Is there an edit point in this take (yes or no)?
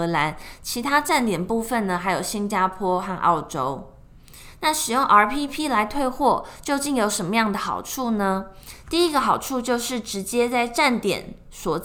no